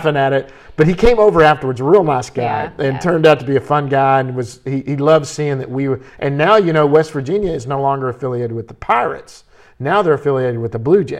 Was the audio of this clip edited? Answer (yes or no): no